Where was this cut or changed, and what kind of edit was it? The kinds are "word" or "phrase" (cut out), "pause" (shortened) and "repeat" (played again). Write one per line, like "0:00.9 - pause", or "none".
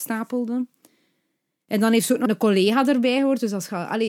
0:02.3 - word